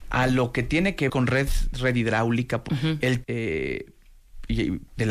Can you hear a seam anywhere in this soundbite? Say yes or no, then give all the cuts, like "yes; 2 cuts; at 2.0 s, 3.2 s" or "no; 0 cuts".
yes; 3 cuts; at 1.1 s, 2.7 s, 3.2 s